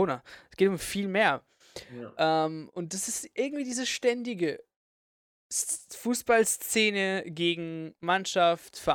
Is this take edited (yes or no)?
no